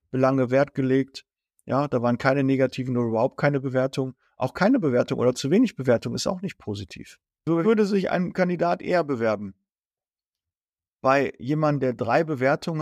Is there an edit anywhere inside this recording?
yes; 1 cut; at 7.6 s

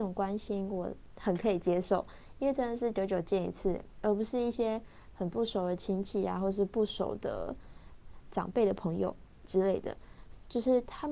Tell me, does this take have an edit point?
no; 0 cuts

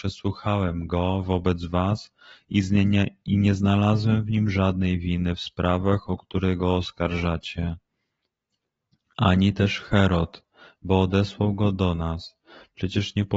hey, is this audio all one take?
yes; 0 cuts

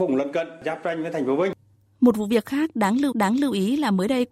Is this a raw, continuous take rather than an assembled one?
no; 1 cut; at 3.1 s

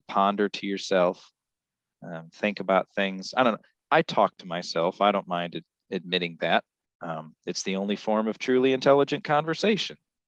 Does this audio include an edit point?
no; 0 cuts

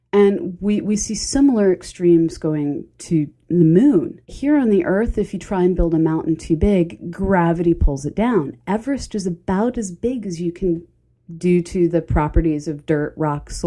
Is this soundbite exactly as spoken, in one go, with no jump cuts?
no; 1 cut; at 4.2 s

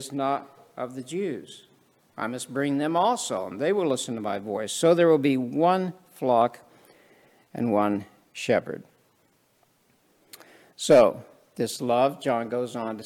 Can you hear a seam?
no; 0 cuts

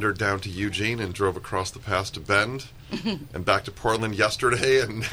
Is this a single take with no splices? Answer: yes; 0 cuts

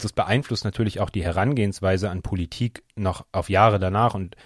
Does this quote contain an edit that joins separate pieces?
no; 0 cuts

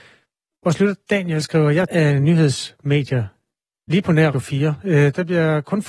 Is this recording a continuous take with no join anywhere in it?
no; 2 cuts; at 1.9 s, 4.3 s

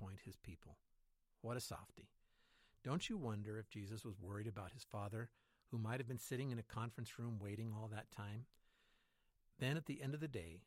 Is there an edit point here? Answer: no; 0 cuts

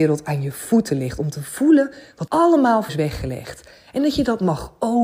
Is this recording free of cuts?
no; 2 cuts; at 2.3 s, 2.9 s

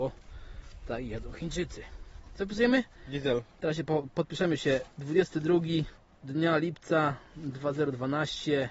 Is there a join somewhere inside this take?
no; 0 cuts

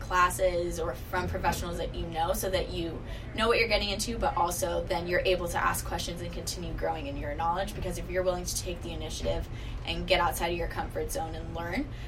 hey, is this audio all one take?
yes; 0 cuts

